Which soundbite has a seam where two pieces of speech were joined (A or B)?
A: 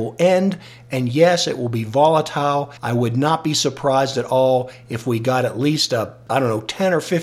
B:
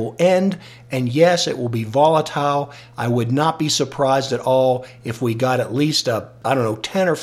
A